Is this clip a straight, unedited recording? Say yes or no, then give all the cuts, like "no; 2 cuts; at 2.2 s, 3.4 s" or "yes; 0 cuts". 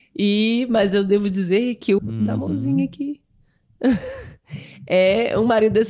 no; 1 cut; at 2.0 s